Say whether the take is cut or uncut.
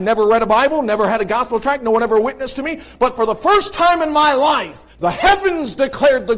cut